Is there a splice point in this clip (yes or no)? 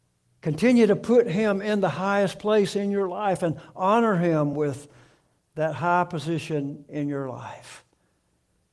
no